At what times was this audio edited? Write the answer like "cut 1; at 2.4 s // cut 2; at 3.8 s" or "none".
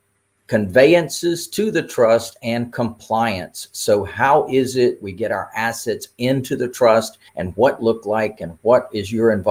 cut 1; at 5.0 s // cut 2; at 7.3 s // cut 3; at 7.8 s